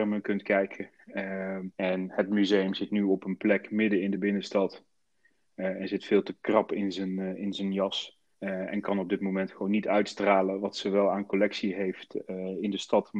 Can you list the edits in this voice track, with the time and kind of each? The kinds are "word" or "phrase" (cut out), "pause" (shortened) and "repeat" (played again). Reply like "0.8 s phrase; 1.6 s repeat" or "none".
1.7 s pause; 8.3 s pause